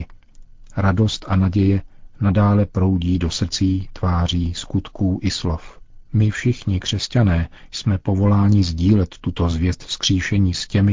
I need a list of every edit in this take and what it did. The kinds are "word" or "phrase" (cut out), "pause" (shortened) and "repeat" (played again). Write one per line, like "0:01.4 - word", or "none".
none